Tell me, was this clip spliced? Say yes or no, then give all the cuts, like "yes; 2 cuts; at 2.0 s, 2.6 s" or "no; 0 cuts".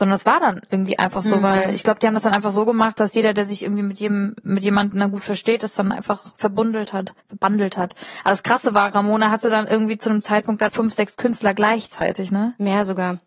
yes; 2 cuts; at 7.2 s, 10.7 s